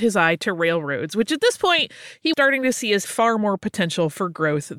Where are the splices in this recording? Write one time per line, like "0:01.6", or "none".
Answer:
0:02.3
0:03.0